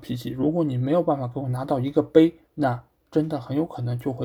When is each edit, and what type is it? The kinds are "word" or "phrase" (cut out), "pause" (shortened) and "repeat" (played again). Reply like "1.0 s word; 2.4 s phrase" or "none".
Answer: 2.4 s pause